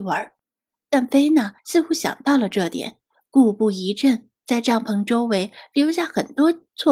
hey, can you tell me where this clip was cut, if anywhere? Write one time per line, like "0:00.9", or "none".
0:01.6
0:04.4